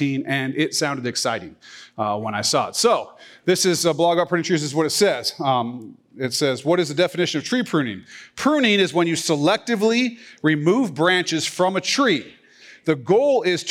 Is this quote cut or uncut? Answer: uncut